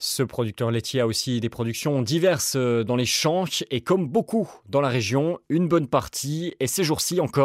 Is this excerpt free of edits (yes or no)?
yes